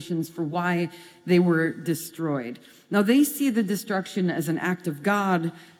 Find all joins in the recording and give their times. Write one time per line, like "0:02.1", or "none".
none